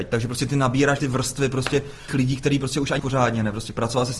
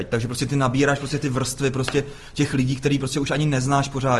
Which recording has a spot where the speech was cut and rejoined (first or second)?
first